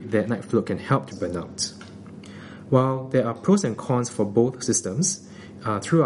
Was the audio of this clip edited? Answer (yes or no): yes